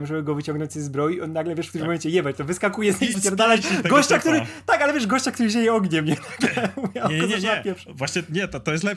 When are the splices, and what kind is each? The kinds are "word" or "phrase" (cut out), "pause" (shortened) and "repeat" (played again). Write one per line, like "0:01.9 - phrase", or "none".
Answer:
0:03.1 - word